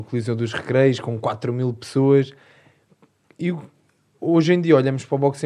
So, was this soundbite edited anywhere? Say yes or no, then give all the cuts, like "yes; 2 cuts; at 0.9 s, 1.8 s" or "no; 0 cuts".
no; 0 cuts